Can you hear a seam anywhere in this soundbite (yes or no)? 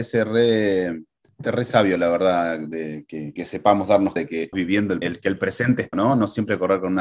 yes